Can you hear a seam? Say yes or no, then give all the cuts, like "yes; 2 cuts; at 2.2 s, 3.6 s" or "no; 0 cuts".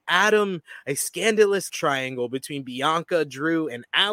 yes; 1 cut; at 1.7 s